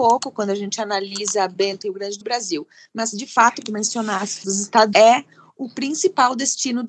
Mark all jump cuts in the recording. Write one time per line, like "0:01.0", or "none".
0:01.8
0:02.2
0:03.6
0:04.4
0:04.9